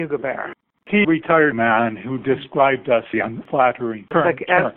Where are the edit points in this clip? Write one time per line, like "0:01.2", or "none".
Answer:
0:01.0
0:01.5
0:03.1

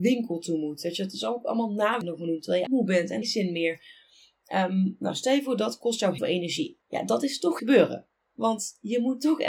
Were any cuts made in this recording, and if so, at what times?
0:02.0
0:02.7
0:03.2
0:06.2
0:06.8
0:07.6

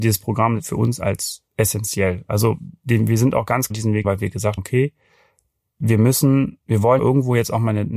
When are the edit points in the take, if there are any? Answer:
0:01.5
0:03.7
0:04.0
0:04.6
0:07.0

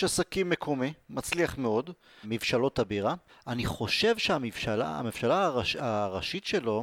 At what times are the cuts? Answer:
0:02.2
0:03.3

